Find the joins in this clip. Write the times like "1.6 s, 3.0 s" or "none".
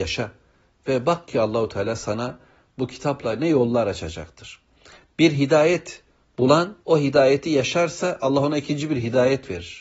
6.8 s